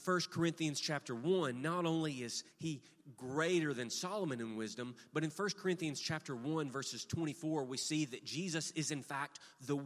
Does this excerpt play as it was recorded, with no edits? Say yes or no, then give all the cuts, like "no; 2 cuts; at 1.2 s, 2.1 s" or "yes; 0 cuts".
no; 1 cut; at 2.5 s